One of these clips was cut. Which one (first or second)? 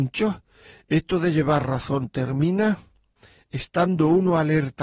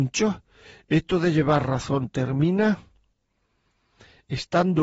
first